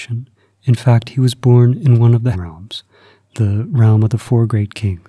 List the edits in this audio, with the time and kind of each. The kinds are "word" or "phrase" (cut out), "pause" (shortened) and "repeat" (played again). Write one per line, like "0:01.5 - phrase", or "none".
0:02.3 - word